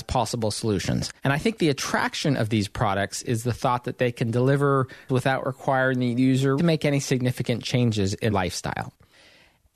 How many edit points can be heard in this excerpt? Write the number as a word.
four